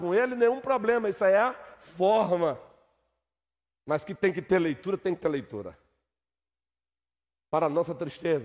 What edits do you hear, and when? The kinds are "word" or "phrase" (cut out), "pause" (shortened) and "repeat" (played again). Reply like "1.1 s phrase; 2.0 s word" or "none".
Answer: none